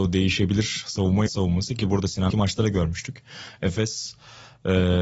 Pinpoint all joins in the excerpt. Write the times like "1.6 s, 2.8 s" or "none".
1.3 s, 2.3 s